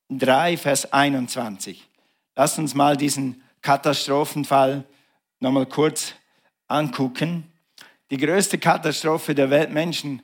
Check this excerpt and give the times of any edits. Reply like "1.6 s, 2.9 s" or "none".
none